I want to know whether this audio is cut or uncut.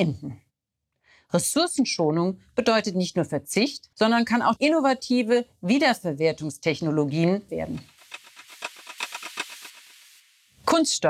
cut